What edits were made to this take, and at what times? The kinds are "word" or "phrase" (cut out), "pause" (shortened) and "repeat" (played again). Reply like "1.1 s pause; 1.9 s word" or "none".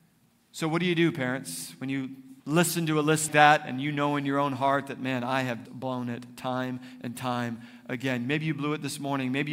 2.4 s pause; 3.3 s word; 5.7 s word